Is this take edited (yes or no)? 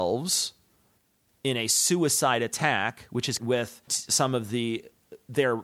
yes